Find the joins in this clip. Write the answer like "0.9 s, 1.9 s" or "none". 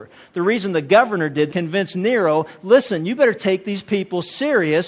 1.5 s